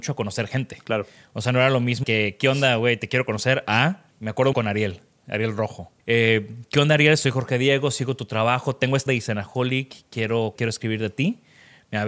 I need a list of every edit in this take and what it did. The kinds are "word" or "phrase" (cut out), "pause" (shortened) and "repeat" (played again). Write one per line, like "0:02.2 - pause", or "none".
0:02.0 - word
0:04.1 - pause
0:04.5 - word
0:06.0 - pause
0:09.1 - word
0:10.6 - word